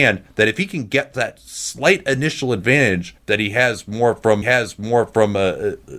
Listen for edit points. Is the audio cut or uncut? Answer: cut